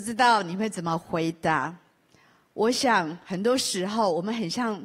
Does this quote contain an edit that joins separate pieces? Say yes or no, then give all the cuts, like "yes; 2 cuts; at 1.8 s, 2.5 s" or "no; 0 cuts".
no; 0 cuts